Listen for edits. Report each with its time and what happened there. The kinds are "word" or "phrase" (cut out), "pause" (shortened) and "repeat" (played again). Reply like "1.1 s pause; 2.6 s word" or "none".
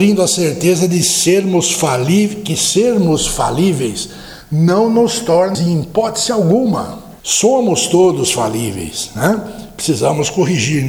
5.5 s word; 7.2 s pause